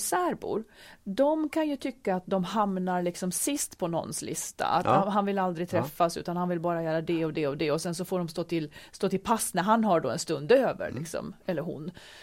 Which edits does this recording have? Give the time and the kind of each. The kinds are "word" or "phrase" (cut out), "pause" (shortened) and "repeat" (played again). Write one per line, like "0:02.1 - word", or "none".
none